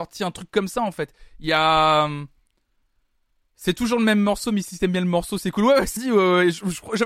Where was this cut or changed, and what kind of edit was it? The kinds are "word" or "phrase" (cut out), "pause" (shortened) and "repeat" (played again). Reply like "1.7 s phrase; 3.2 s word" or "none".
6.0 s word

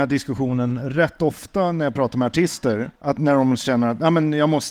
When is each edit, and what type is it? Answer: 2.9 s pause

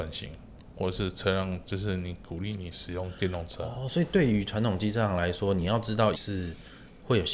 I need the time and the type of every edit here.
6.1 s word

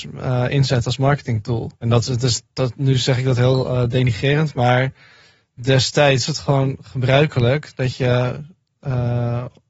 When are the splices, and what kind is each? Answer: 1.8 s pause; 2.1 s word; 6.3 s word

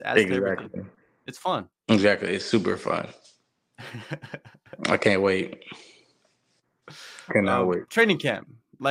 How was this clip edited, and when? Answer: 1.7 s pause

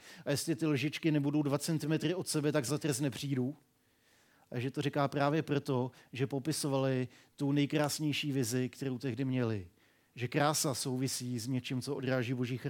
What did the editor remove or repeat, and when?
2.7 s word

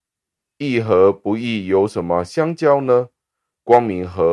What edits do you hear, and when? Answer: none

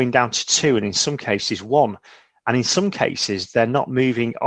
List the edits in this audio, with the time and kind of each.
none

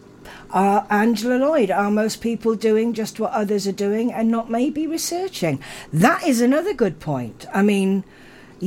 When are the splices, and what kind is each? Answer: none

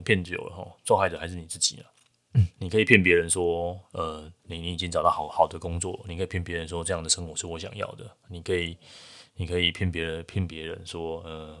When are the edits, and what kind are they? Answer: 2.5 s pause; 4.4 s pause

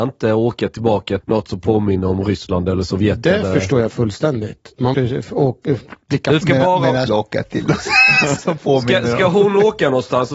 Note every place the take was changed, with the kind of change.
1.2 s word; 4.9 s word; 6.0 s pause; 6.4 s phrase; 7.1 s phrase; 8.4 s word

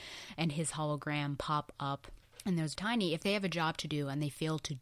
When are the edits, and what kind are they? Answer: 2.7 s word

